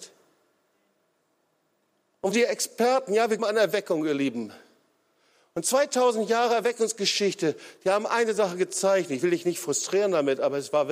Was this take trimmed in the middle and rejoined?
yes; 2 cuts; at 2.3 s, 3.4 s

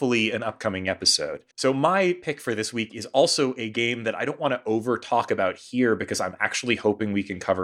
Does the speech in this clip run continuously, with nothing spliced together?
no; 1 cut; at 1.5 s

